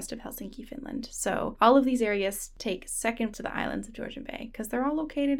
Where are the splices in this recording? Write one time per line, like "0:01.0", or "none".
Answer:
0:03.3